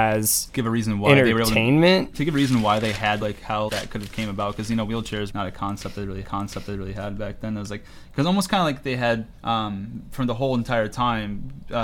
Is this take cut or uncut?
cut